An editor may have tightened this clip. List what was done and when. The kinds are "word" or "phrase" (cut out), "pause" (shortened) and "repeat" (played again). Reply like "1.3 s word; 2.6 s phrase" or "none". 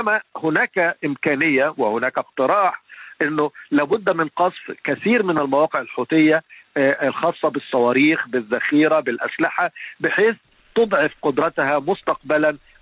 none